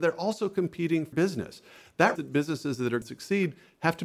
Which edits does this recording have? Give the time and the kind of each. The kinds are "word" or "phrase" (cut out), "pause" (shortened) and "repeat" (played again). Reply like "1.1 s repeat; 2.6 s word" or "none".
1.1 s word; 2.2 s word; 3.0 s word